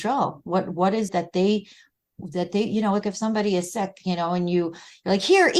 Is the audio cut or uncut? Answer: cut